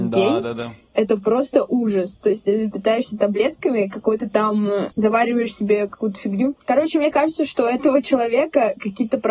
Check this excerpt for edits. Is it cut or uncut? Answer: cut